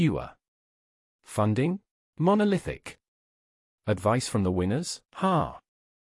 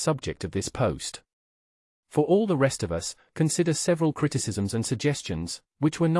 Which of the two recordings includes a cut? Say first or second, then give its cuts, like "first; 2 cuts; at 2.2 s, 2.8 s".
first; 2 cuts; at 1.9 s, 5.0 s